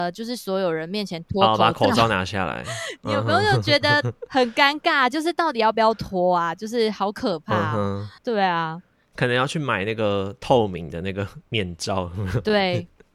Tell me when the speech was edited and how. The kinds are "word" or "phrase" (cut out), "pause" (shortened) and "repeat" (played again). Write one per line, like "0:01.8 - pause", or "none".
0:08.2 - pause
0:08.9 - pause